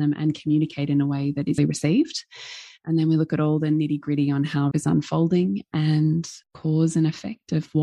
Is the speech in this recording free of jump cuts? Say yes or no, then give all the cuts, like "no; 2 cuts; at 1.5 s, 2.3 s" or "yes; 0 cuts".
no; 3 cuts; at 1.6 s, 4.7 s, 6.4 s